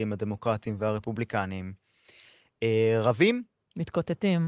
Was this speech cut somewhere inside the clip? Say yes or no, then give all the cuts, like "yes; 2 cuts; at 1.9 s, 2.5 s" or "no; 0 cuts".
no; 0 cuts